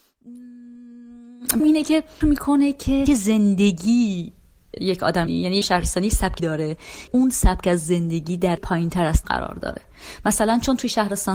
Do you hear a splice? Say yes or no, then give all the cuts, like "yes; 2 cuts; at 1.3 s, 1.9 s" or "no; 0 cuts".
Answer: yes; 9 cuts; at 1.6 s, 2.2 s, 3.1 s, 5.3 s, 5.6 s, 6.4 s, 7.1 s, 8.6 s, 9.2 s